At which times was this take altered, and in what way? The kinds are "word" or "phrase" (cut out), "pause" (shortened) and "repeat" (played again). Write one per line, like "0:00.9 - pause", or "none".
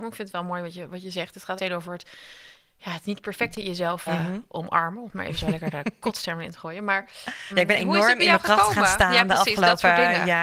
0:01.6 - word
0:04.1 - word
0:07.5 - word